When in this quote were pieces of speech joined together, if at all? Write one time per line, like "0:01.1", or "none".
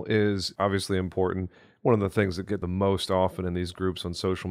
0:02.6